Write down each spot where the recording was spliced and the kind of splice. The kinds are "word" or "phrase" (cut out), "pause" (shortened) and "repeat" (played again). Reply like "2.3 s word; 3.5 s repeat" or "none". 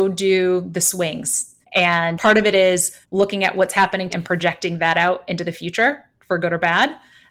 1.6 s pause; 3.0 s pause; 4.1 s word

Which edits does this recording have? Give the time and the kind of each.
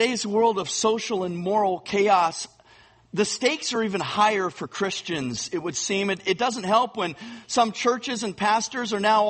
none

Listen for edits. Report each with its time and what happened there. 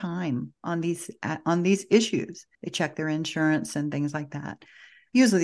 2.5 s pause

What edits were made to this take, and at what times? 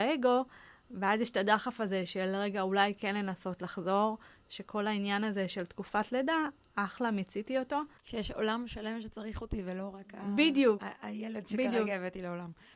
8.0 s pause

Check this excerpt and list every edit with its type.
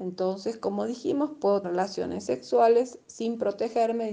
1.6 s word

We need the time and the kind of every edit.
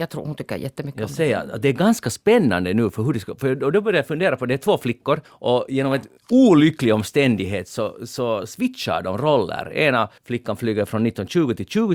5.2 s pause; 6.2 s pause; 10.2 s pause

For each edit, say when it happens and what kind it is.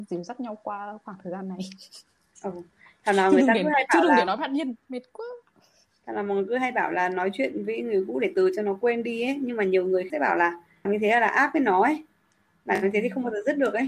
8.3 s word; 10.1 s word; 10.9 s word

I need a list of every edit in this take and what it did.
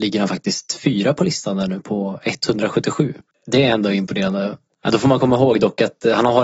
none

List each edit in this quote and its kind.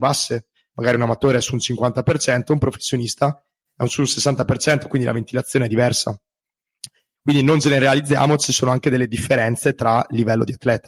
none

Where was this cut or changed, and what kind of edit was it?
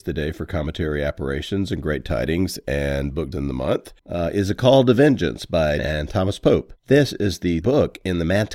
3.3 s word; 4.0 s pause; 5.8 s phrase; 6.8 s pause; 7.6 s word

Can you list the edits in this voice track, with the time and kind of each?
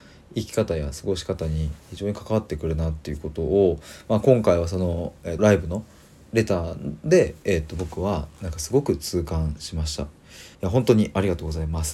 5.4 s word; 10.5 s pause

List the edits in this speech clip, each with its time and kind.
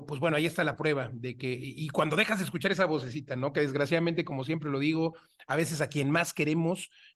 none

